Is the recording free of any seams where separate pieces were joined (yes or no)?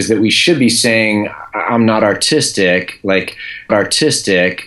no